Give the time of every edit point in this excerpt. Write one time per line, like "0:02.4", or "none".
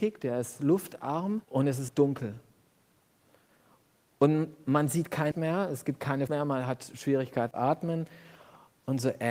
0:01.4
0:01.9
0:05.3
0:06.3
0:07.5